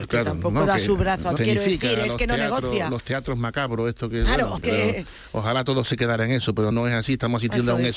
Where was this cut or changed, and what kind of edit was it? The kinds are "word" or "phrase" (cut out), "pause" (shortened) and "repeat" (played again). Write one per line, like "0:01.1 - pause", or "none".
0:01.4 - word
0:04.6 - word
0:06.7 - word

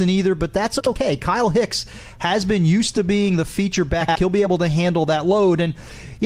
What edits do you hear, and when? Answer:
none

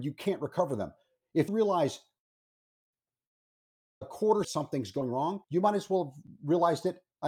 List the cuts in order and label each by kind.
0:01.5 - word
0:04.4 - phrase
0:05.4 - pause

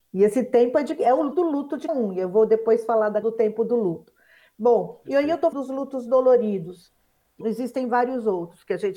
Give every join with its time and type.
0:01.3 - word
0:01.9 - word
0:03.2 - word
0:05.5 - word
0:07.4 - word

